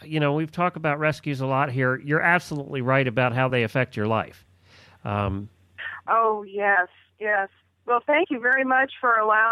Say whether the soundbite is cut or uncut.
uncut